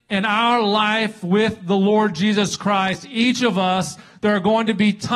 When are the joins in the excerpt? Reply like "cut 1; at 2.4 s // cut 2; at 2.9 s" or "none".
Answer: none